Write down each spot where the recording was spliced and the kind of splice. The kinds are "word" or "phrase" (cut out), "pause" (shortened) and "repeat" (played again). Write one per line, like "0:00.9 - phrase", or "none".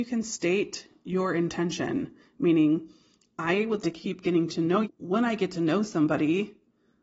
0:03.8 - word
0:04.8 - word